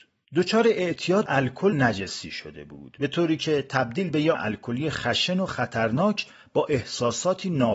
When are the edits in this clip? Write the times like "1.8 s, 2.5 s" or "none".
1.3 s, 1.7 s, 4.3 s